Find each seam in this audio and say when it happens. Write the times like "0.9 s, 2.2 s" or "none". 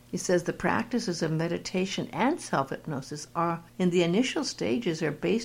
3.7 s